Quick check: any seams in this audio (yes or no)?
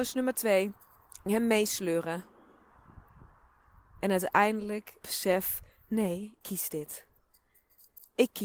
yes